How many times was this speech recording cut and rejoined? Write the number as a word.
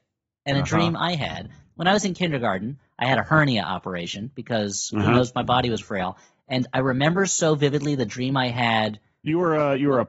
one